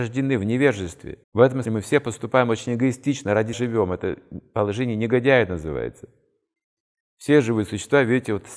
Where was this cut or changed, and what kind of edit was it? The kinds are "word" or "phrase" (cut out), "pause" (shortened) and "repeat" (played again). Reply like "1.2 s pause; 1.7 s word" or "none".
1.2 s pause; 1.6 s word; 3.5 s word